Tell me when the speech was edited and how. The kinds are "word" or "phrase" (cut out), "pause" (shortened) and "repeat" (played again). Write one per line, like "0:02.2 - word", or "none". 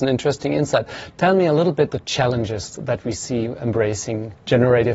0:01.9 - word